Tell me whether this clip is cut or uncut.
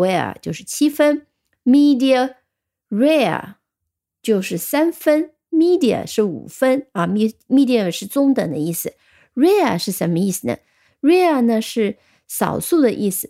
uncut